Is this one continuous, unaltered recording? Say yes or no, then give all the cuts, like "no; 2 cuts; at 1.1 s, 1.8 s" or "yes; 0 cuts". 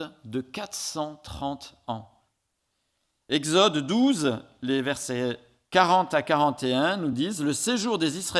yes; 0 cuts